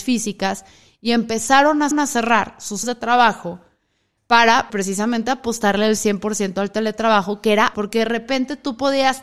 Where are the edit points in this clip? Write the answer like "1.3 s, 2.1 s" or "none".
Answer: 1.9 s, 2.8 s, 4.7 s, 7.7 s

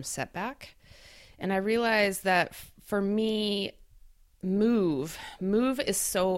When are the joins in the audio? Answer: none

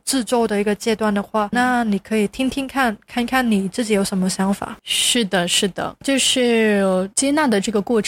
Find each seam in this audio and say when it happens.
4.8 s

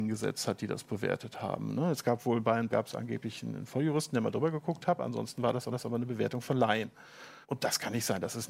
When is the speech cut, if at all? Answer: 2.7 s, 5.7 s, 7.4 s

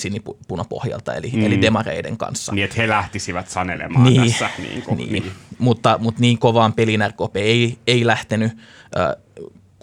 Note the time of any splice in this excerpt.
none

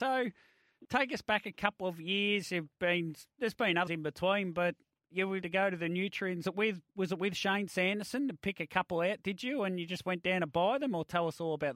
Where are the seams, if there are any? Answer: 3.9 s, 5.4 s, 6.4 s

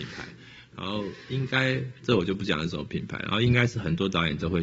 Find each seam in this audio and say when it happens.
none

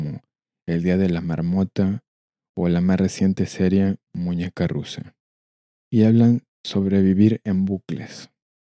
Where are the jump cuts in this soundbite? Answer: none

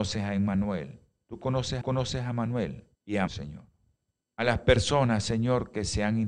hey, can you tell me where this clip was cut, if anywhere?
1.8 s, 2.9 s, 3.3 s, 4.1 s

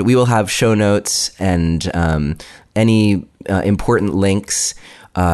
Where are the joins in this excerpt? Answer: none

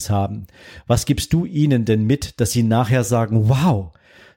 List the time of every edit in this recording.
none

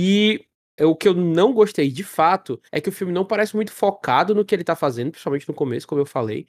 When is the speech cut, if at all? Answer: 2.7 s

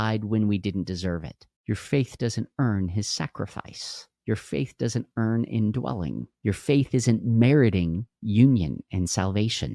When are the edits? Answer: 1.6 s, 4.2 s, 6.3 s

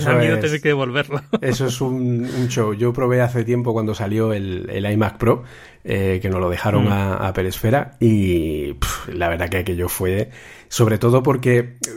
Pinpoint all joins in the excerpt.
none

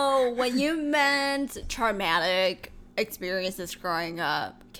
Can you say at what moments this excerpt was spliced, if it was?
2.9 s

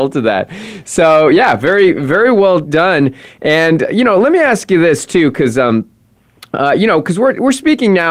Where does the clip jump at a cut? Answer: none

